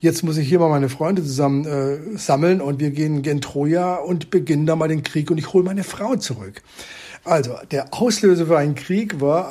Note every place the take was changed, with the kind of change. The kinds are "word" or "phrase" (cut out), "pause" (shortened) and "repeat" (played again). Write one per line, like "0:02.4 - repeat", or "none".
none